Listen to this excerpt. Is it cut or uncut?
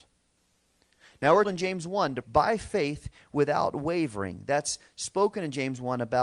cut